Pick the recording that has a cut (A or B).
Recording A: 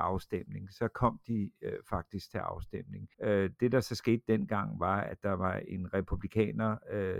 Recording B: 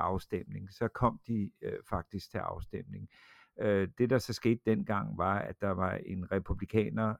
A